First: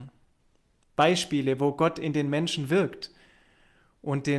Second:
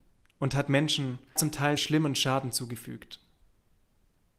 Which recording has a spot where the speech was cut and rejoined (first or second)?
second